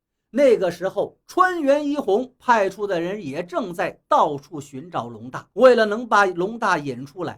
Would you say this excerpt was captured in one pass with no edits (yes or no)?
no